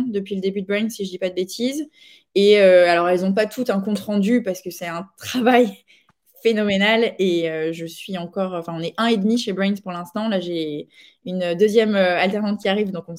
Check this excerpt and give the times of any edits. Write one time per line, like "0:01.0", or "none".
none